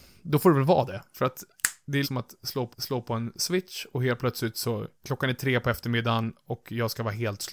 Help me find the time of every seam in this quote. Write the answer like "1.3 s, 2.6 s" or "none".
2.0 s, 2.7 s, 4.9 s